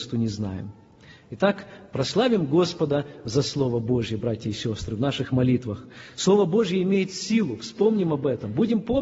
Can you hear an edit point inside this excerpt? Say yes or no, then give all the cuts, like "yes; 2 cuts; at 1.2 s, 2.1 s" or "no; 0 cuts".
no; 0 cuts